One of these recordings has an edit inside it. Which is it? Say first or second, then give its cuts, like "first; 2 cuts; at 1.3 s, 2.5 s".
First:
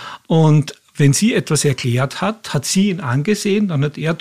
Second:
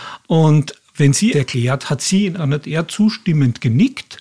second; 3 cuts; at 1.3 s, 1.8 s, 2.4 s